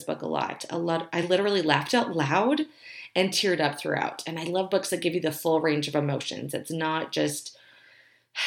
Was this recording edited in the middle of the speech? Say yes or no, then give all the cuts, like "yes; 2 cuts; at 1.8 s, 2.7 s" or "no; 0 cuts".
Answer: no; 0 cuts